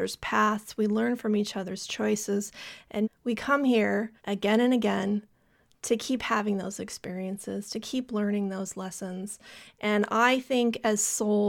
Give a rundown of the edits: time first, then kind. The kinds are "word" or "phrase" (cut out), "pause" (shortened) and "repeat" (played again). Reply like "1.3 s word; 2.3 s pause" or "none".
3.0 s word; 4.2 s pause